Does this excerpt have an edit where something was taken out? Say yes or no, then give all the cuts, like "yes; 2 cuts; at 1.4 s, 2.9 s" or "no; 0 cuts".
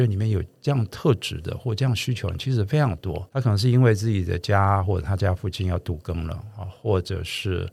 yes; 1 cut; at 3.3 s